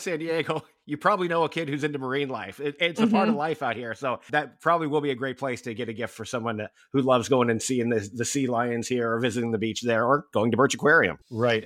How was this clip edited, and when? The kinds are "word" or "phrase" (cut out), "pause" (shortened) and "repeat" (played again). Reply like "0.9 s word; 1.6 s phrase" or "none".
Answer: none